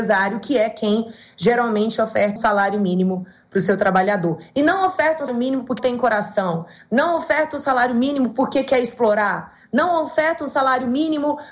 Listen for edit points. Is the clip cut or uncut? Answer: cut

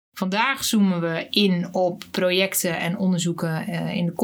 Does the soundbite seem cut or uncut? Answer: uncut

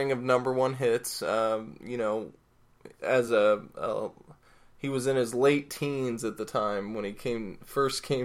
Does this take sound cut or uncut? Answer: uncut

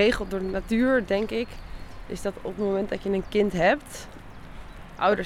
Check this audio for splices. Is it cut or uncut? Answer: uncut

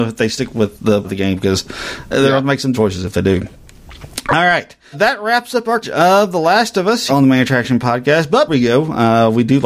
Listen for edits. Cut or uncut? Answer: cut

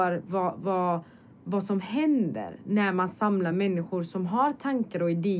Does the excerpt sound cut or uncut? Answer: uncut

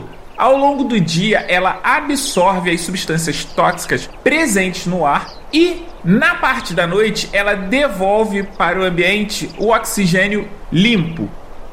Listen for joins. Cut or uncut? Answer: uncut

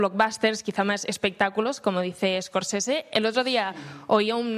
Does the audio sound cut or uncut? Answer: uncut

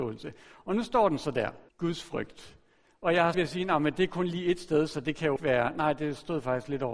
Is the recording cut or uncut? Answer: cut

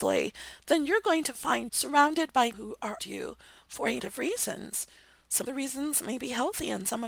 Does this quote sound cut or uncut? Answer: cut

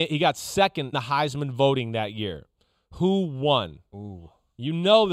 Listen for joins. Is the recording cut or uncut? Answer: cut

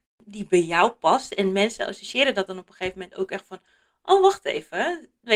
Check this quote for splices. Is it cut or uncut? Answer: uncut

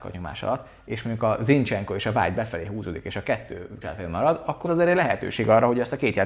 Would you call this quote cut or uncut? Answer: cut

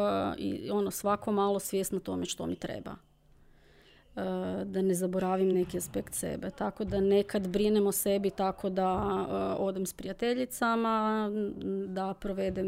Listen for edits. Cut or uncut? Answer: uncut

